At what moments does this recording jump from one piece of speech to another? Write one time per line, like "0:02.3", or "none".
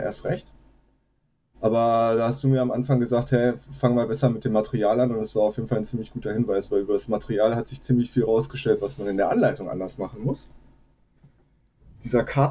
none